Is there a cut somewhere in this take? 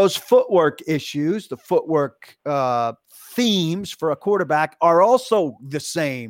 no; 0 cuts

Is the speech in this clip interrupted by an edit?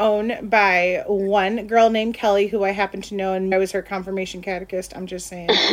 yes; 1 cut; at 3.5 s

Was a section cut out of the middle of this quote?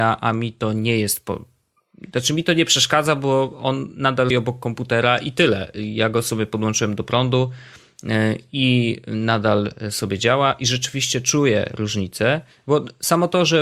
yes; 1 cut; at 4.3 s

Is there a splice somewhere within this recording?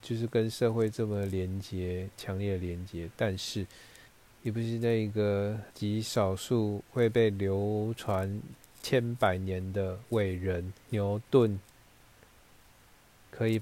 yes; 4 cuts; at 4.1 s, 5.7 s, 8.7 s, 10.8 s

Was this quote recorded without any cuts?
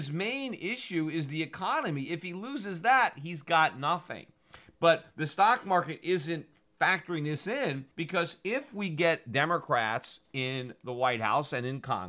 no; 1 cut; at 7.9 s

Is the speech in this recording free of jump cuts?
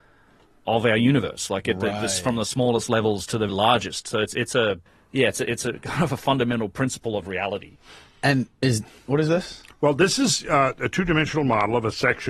no; 2 cuts; at 3.5 s, 4.9 s

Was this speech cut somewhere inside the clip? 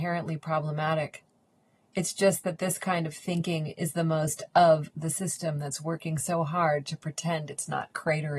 no; 0 cuts

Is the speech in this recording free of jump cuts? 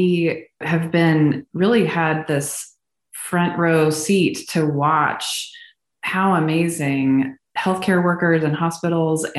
yes; 0 cuts

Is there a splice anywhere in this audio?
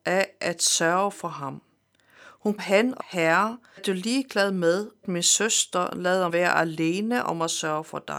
yes; 5 cuts; at 2.6 s, 3.0 s, 3.8 s, 5.0 s, 6.3 s

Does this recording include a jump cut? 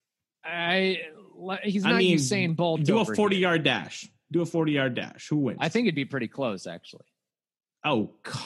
no; 0 cuts

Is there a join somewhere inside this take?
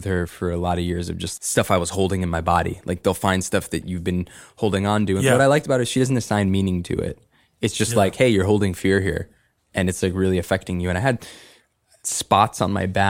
yes; 1 cut; at 1.4 s

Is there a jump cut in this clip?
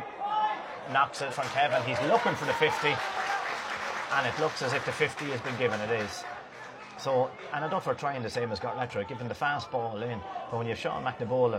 yes; 1 cut; at 1.3 s

